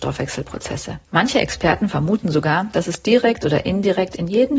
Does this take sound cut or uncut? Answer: cut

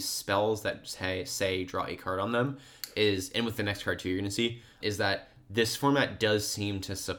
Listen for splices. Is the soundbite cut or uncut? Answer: cut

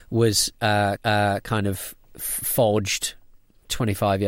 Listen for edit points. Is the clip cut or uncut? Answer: cut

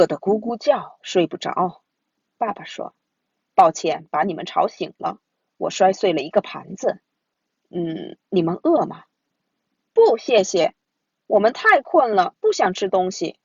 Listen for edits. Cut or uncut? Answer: uncut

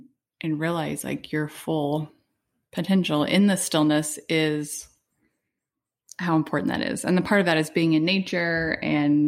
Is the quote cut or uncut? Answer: uncut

